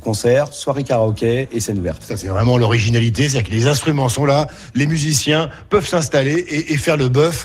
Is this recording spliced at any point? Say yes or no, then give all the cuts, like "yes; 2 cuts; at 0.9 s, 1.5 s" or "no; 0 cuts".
no; 0 cuts